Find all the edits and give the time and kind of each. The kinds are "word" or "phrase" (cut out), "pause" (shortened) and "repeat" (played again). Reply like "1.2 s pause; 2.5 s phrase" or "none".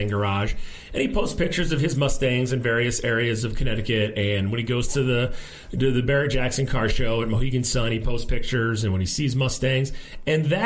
none